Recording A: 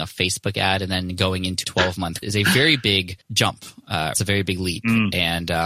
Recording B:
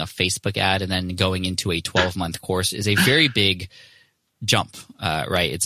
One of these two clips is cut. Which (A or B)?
A